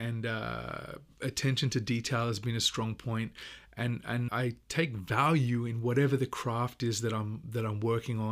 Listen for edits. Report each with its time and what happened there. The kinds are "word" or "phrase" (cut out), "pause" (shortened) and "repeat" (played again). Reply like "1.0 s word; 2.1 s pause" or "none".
4.3 s word